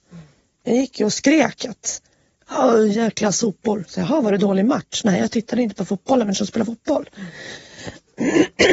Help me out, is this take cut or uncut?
cut